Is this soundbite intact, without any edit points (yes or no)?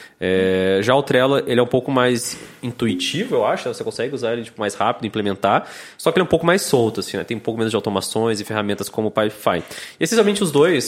yes